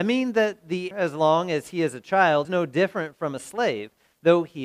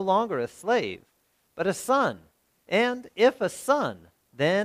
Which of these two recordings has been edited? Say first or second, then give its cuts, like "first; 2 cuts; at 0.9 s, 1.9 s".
first; 2 cuts; at 0.9 s, 2.4 s